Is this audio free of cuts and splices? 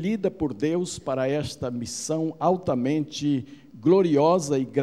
yes; 0 cuts

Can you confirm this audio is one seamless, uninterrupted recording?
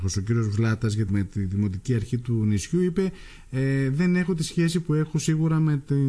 no; 1 cut; at 1.1 s

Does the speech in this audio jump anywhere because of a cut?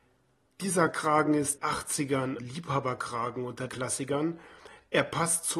yes; 3 cuts; at 1.6 s, 2.4 s, 3.7 s

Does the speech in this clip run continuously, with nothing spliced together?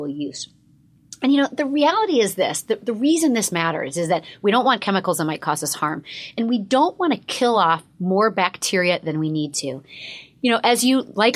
yes; 0 cuts

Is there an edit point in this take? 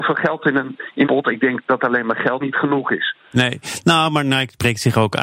yes; 2 cuts; at 1.1 s, 2.4 s

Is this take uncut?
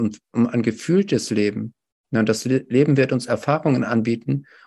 yes; 0 cuts

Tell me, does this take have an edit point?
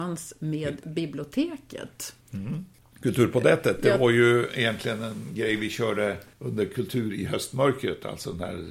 yes; 2 cuts; at 2.2 s, 6.3 s

